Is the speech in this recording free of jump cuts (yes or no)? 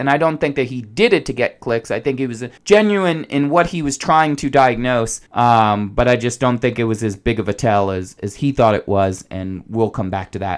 no